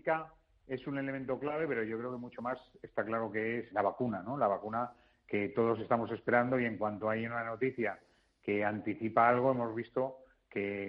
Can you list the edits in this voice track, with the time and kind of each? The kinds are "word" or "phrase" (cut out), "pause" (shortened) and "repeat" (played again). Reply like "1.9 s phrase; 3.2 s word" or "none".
3.7 s word